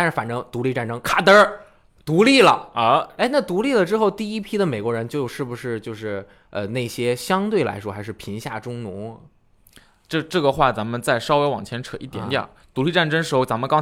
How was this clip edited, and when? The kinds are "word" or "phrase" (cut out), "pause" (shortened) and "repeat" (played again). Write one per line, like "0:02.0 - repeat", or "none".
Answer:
none

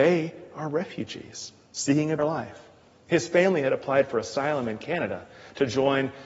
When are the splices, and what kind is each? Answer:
0:02.2 - word

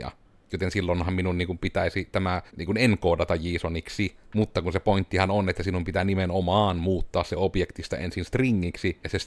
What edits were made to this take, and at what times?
0:02.5 - pause
0:04.2 - pause

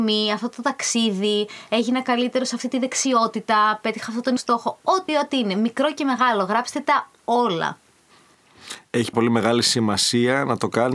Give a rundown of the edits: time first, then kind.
0:04.4 - word
0:05.1 - word
0:09.1 - word

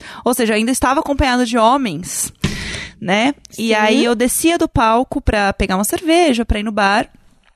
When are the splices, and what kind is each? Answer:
none

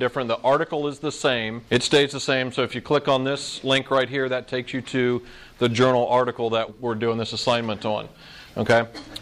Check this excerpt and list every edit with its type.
0:01.7 - pause
0:06.7 - word

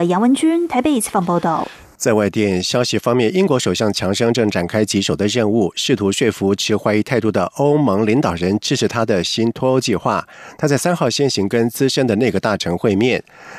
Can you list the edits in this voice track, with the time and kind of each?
none

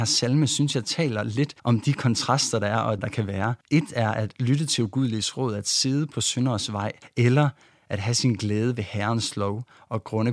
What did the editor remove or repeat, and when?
0:01.6 - pause
0:03.0 - phrase
0:03.6 - pause
0:07.0 - pause

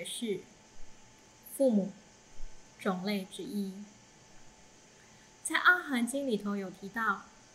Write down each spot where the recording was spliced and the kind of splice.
0:02.7 - pause

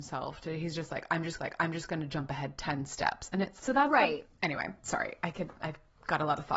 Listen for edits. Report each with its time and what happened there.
0:01.4 - repeat
0:03.6 - word

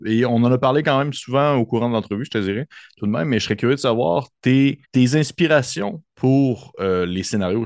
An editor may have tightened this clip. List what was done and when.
0:04.8 - pause

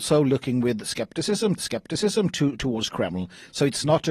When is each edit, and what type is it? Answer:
0:01.6 - repeat

